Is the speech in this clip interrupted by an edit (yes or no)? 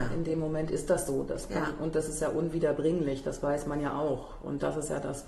no